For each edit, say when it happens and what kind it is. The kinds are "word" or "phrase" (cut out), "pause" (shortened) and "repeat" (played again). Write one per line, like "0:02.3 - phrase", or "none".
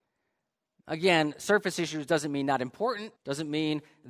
0:03.2 - pause